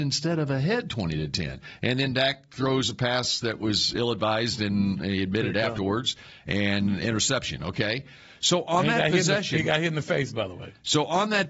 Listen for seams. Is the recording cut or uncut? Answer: uncut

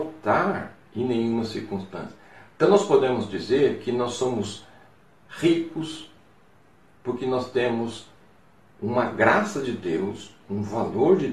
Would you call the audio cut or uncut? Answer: uncut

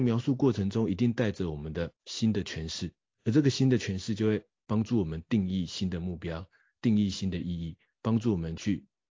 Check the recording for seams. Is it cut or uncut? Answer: uncut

